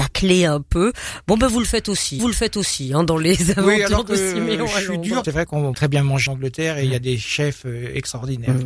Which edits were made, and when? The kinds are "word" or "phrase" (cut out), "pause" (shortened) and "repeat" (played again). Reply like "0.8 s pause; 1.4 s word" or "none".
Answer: 2.2 s repeat; 5.2 s phrase; 5.7 s phrase; 6.3 s word

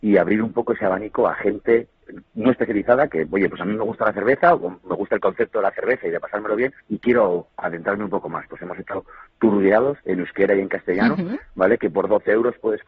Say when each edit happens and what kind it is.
6.8 s pause; 7.5 s pause; 10.0 s pause

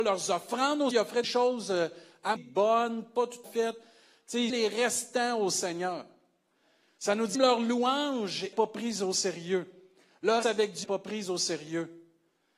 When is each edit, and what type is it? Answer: 0.9 s word; 1.2 s word; 2.4 s word; 3.4 s word; 4.5 s word; 7.3 s word; 8.5 s word; 10.4 s word; 10.8 s word

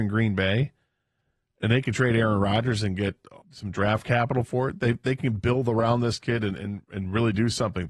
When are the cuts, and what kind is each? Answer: 3.4 s pause

